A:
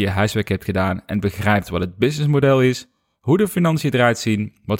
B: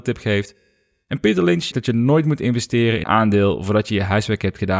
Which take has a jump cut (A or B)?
B